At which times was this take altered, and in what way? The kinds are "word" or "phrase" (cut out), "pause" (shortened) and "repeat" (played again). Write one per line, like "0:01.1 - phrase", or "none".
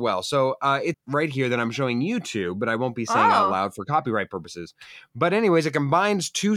0:00.9 - phrase